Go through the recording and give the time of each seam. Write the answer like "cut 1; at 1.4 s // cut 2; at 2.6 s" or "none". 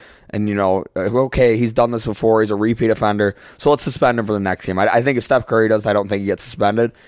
cut 1; at 5.8 s